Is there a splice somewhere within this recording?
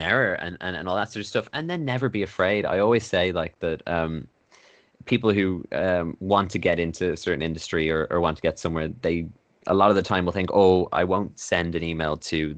no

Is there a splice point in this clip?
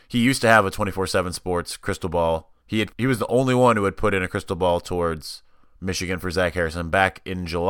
yes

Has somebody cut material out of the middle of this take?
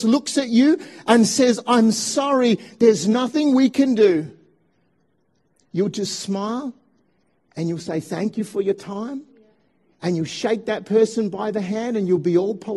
no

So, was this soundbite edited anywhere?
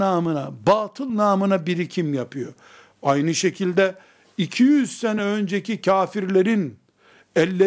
no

